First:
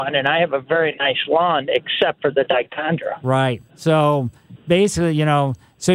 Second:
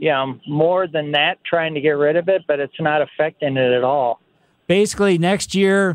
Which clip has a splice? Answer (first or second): first